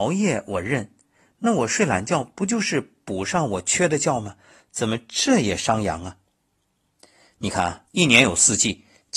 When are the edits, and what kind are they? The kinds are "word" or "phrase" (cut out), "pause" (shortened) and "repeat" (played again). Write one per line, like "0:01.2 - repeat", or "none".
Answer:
0:07.9 - pause